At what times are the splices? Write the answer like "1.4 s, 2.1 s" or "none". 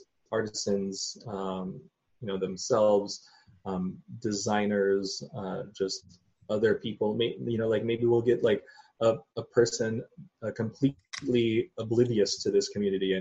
none